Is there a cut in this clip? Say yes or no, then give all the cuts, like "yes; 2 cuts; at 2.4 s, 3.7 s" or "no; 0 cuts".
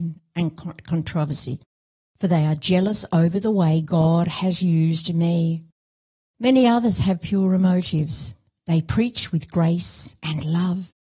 no; 0 cuts